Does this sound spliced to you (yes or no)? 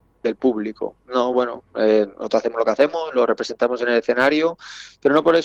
no